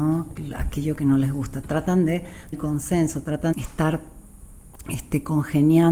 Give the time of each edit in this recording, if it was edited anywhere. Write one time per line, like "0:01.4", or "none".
0:02.5
0:03.5